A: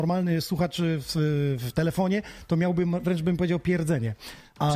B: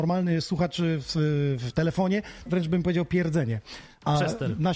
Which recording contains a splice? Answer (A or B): B